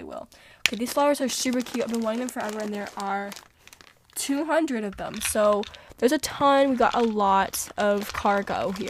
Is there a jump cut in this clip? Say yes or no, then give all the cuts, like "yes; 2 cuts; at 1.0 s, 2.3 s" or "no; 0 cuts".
no; 0 cuts